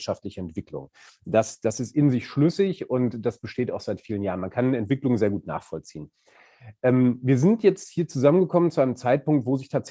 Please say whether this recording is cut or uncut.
uncut